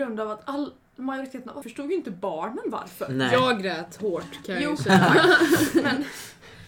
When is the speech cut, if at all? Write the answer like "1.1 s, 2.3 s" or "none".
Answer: 1.6 s